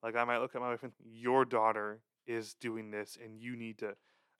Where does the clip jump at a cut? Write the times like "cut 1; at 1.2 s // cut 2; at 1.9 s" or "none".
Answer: cut 1; at 0.9 s